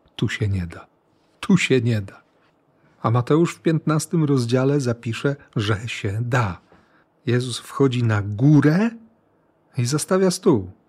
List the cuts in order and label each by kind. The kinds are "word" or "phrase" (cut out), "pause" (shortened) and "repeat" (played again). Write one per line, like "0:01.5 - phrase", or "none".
none